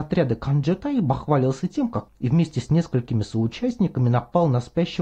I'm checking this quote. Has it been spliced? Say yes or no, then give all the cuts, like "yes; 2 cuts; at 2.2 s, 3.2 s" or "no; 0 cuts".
yes; 1 cut; at 2.1 s